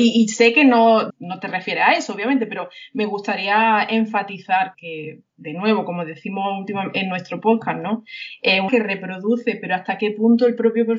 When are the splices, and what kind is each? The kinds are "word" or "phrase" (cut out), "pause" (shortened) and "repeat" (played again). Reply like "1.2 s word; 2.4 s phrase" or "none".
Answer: 1.1 s word; 4.7 s word; 5.3 s word; 8.7 s word